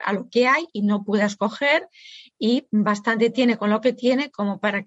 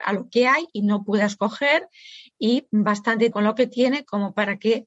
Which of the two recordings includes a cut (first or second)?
second